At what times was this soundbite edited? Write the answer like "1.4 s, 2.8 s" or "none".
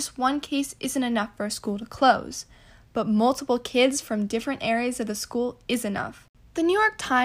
none